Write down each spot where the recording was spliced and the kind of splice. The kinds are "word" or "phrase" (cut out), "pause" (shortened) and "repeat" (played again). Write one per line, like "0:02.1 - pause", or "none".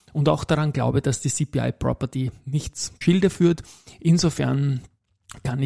0:03.0 - phrase